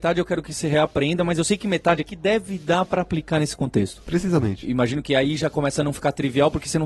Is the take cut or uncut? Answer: uncut